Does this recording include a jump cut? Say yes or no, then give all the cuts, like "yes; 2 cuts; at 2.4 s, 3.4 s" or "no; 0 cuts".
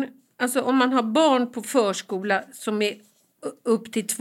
no; 0 cuts